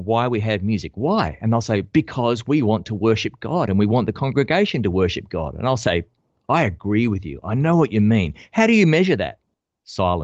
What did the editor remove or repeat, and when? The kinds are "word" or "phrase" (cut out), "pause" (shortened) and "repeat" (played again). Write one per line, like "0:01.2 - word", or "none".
none